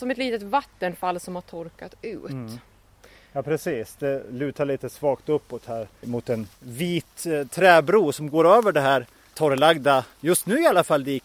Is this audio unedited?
no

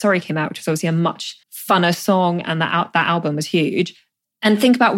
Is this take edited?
yes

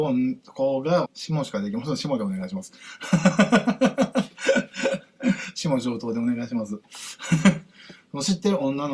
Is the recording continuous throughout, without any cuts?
no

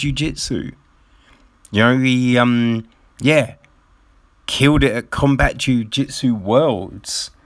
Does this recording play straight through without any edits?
yes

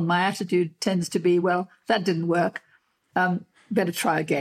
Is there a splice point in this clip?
no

